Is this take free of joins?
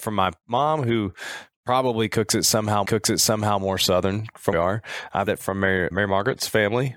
no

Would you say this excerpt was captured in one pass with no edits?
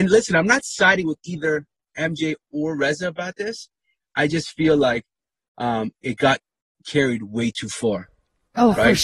yes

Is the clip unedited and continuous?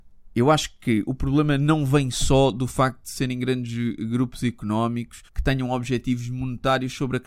no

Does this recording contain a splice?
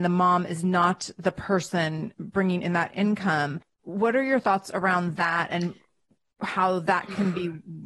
no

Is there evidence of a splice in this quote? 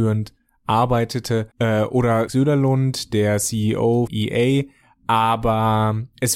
yes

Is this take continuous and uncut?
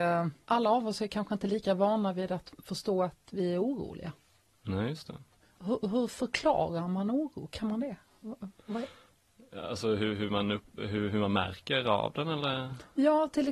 yes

